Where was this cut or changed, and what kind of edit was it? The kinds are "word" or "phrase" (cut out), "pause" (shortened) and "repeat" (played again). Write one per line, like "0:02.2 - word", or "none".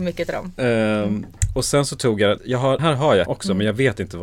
0:02.4 - word
0:02.8 - word
0:03.3 - word